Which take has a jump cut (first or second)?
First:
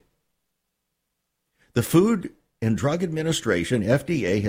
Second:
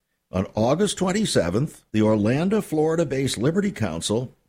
second